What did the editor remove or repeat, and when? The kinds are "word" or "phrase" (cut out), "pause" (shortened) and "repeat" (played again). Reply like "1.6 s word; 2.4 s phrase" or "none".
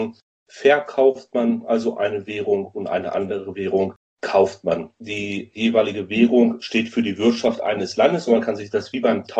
4.9 s pause